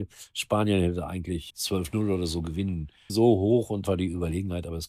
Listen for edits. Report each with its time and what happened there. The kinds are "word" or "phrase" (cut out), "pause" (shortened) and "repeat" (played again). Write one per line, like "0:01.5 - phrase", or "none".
0:01.5 - word
0:03.1 - word
0:03.8 - word